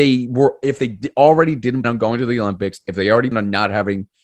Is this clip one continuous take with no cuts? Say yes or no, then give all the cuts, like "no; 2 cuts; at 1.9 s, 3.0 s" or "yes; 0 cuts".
no; 2 cuts; at 1.8 s, 3.3 s